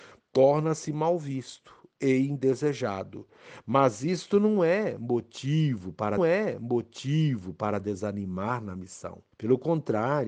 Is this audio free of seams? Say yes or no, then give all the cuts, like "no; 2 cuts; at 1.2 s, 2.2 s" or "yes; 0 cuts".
no; 2 cuts; at 6.2 s, 9.3 s